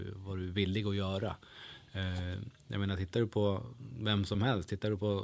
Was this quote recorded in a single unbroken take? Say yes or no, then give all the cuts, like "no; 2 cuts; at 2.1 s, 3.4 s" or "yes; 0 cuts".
yes; 0 cuts